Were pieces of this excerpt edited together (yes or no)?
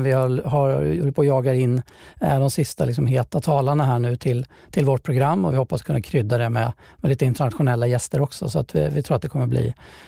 no